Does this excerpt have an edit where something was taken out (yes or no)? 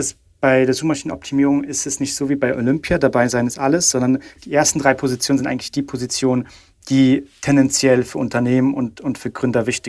no